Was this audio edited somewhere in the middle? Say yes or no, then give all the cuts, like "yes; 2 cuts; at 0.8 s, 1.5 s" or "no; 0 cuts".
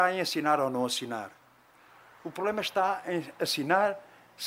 no; 0 cuts